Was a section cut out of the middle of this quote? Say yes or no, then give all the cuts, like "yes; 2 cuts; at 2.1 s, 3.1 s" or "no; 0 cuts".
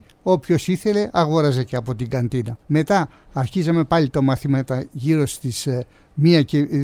yes; 1 cut; at 2.6 s